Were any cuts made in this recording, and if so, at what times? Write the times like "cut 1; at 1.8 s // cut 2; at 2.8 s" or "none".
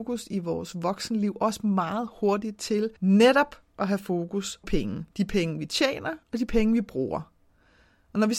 cut 1; at 3.0 s // cut 2; at 4.6 s // cut 3; at 5.1 s // cut 4; at 6.2 s